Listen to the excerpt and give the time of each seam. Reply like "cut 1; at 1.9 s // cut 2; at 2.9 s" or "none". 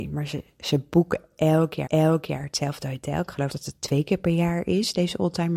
cut 1; at 1.9 s // cut 2; at 3.5 s

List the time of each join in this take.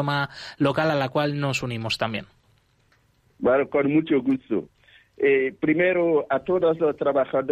none

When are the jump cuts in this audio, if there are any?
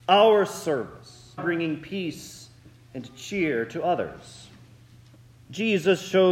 cut 1; at 1.4 s

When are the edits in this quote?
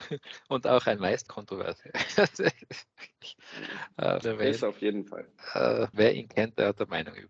cut 1; at 1.3 s // cut 2; at 4.2 s // cut 3; at 5.9 s

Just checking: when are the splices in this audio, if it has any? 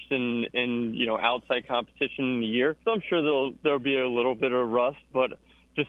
cut 1; at 2.8 s

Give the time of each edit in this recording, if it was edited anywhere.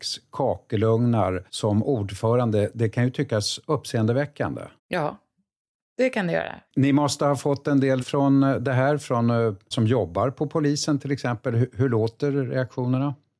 cut 1; at 1.5 s // cut 2; at 4.8 s // cut 3; at 6.7 s // cut 4; at 8.0 s // cut 5; at 9.7 s

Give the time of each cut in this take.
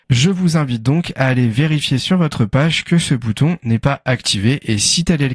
none

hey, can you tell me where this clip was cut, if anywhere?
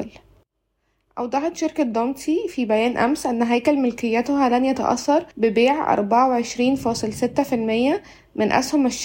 cut 1; at 5.3 s

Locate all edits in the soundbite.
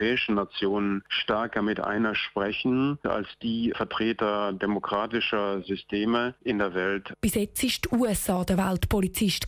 cut 1; at 2.1 s

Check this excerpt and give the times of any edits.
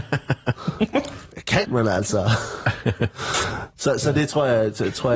cut 1; at 1.6 s

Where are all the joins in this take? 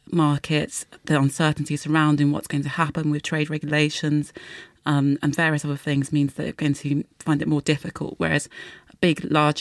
cut 1; at 7.1 s

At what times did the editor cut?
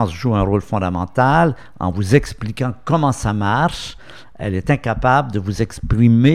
none

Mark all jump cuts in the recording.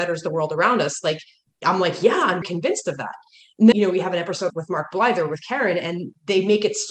cut 1; at 2.4 s // cut 2; at 3.7 s // cut 3; at 4.5 s

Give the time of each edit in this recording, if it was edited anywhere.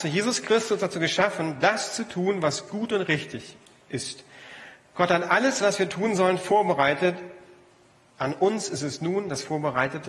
none

